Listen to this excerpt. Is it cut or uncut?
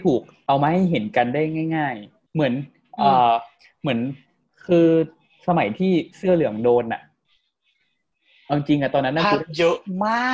cut